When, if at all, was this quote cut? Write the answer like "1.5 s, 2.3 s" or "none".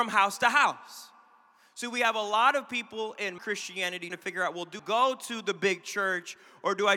3.4 s, 4.1 s, 4.8 s

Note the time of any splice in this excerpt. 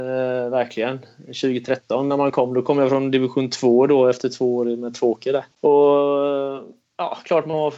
5.5 s

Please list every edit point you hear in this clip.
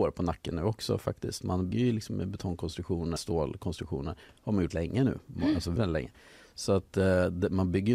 1.7 s, 3.2 s, 4.7 s, 5.8 s

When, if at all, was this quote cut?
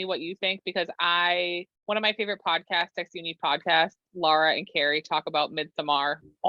1.8 s

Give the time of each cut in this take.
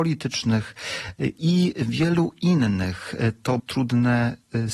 3.6 s

